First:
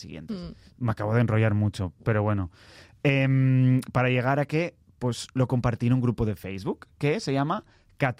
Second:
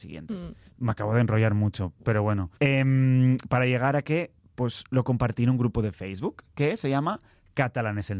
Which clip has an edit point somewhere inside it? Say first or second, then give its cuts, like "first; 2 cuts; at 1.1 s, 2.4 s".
second; 1 cut; at 2.6 s